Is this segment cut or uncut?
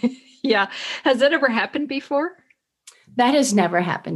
uncut